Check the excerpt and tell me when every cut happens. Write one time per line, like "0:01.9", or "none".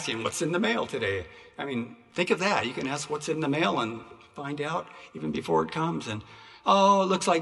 none